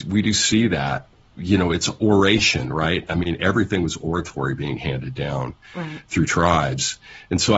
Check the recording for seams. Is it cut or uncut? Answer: uncut